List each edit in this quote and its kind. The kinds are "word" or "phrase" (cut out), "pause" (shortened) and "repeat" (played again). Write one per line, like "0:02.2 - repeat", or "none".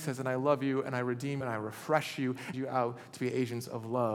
0:01.4 - word
0:02.5 - phrase